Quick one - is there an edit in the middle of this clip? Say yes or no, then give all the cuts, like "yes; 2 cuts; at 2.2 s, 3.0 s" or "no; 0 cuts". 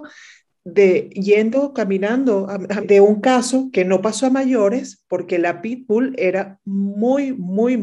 yes; 1 cut; at 2.8 s